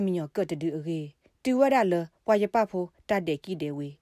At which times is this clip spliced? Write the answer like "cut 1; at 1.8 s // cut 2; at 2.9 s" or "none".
none